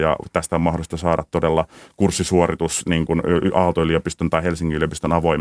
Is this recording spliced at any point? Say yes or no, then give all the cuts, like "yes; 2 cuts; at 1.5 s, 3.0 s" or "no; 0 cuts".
no; 0 cuts